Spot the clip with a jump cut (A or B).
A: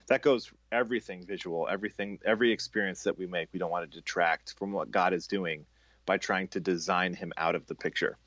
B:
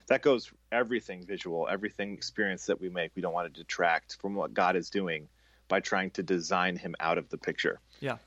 B